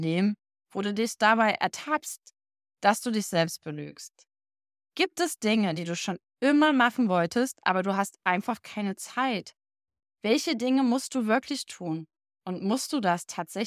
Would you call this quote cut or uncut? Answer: uncut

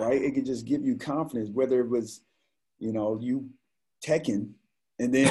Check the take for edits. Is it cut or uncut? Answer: uncut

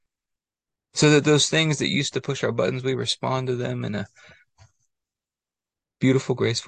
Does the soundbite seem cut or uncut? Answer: uncut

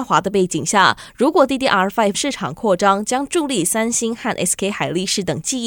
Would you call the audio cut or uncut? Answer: cut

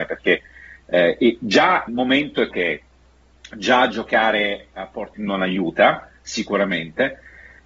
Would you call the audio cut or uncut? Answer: cut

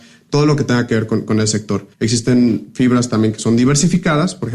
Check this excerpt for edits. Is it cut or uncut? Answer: cut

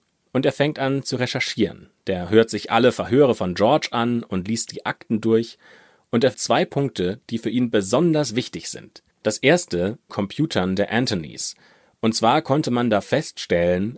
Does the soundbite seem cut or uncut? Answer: cut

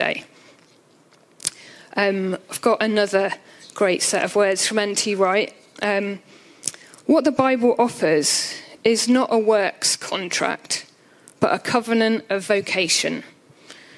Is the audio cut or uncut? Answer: uncut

